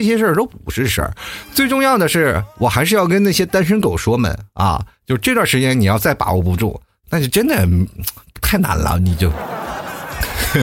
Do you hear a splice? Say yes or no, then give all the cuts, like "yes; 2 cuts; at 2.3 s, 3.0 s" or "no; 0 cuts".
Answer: no; 0 cuts